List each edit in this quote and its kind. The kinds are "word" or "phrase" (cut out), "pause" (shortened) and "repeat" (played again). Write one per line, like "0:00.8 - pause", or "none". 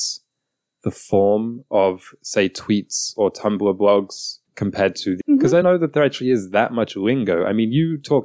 0:04.5 - pause
0:05.2 - phrase
0:05.6 - word